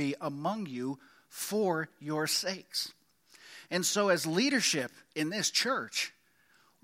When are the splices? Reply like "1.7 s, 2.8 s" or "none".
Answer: none